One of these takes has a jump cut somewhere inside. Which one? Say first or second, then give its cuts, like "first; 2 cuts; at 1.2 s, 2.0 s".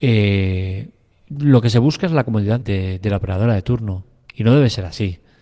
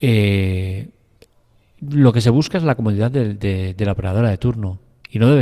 first; 2 cuts; at 1.1 s, 2.6 s